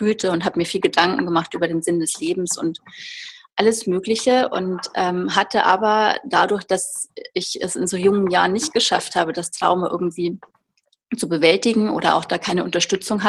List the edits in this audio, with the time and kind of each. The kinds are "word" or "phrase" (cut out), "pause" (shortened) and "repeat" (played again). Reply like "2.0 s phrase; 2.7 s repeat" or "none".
none